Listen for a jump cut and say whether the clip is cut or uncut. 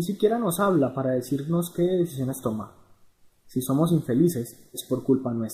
uncut